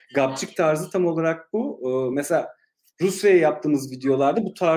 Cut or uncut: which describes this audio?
uncut